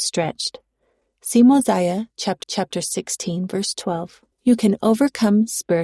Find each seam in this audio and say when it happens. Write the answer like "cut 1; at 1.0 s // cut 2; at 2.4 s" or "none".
cut 1; at 2.4 s // cut 2; at 4.3 s